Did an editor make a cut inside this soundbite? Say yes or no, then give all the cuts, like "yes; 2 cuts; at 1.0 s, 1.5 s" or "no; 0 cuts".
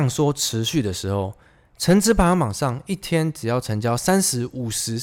no; 0 cuts